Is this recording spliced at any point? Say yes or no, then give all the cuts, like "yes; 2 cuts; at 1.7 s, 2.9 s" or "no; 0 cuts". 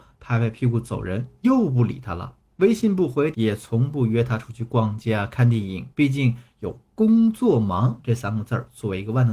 yes; 2 cuts; at 3.3 s, 5.9 s